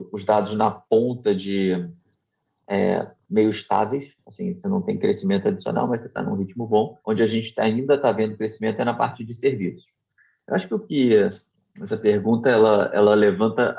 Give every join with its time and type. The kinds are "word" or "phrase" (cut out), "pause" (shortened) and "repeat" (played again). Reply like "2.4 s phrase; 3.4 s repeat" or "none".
7.0 s pause